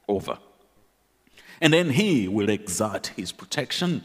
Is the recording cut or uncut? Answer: uncut